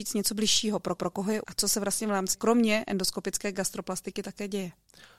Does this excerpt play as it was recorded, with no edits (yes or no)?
no